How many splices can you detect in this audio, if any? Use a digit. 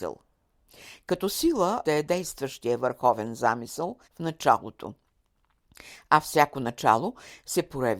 2